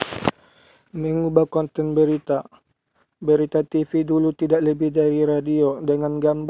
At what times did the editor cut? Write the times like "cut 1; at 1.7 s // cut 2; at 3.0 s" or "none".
none

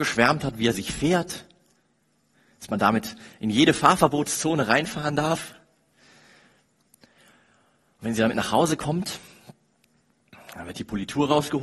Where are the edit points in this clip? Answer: none

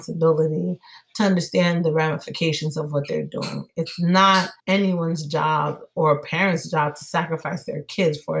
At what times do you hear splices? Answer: cut 1; at 4.6 s

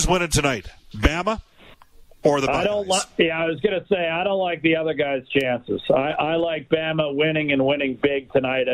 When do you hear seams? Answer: none

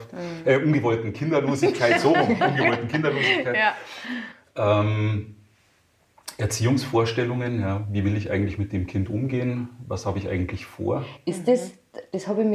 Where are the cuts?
none

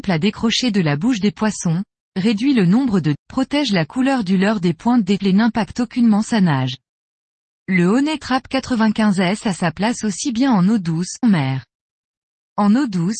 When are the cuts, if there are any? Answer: cut 1; at 3.1 s // cut 2; at 5.2 s // cut 3; at 11.2 s

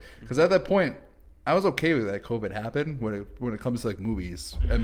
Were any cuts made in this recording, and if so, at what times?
none

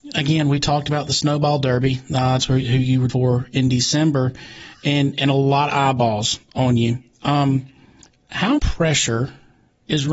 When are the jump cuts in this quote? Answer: cut 1; at 2.4 s // cut 2; at 3.1 s // cut 3; at 8.6 s

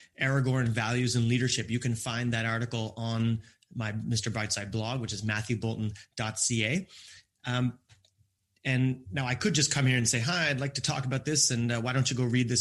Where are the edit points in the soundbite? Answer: none

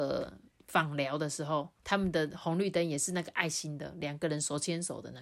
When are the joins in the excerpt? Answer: cut 1; at 1.8 s

